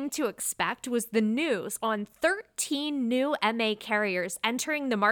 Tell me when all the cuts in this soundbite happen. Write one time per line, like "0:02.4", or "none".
none